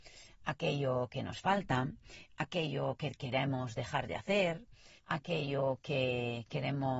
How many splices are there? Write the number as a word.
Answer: one